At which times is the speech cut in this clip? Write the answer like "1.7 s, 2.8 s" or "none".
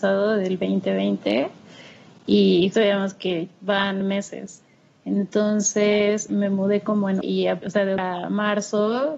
2.7 s, 4.0 s, 6.3 s, 7.2 s, 7.6 s, 8.0 s